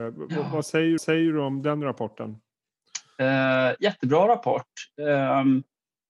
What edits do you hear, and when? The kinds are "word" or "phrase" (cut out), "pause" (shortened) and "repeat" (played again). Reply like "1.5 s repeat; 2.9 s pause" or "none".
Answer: 1.0 s repeat